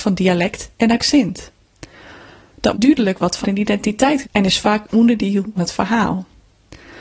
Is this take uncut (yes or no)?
no